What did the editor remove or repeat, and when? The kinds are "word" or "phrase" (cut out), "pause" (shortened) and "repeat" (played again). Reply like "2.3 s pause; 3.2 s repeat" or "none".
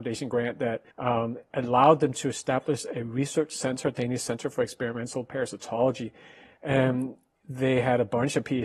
0.9 s pause